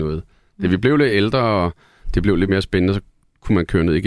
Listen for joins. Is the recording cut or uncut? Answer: uncut